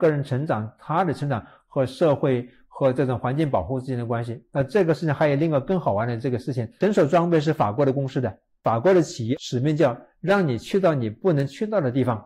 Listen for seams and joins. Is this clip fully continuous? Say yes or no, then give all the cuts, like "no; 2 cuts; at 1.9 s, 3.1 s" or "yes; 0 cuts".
yes; 0 cuts